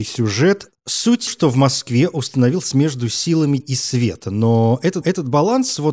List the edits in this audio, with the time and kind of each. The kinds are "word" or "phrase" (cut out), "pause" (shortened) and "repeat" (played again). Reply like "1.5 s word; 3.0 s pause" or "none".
1.3 s phrase; 2.7 s word; 3.6 s word; 5.0 s repeat